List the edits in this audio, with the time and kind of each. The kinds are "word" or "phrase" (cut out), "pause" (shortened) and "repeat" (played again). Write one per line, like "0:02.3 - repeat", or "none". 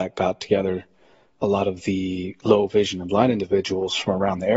none